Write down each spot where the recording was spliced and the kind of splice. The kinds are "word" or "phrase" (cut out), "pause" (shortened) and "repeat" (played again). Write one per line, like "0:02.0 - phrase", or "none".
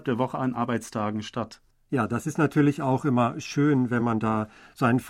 none